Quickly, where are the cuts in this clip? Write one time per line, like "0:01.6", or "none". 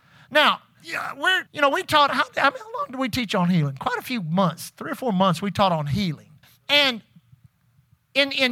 0:01.5
0:06.4